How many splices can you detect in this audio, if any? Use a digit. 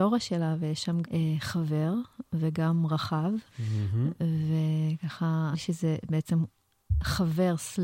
3